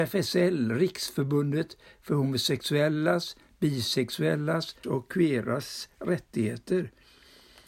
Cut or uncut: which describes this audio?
cut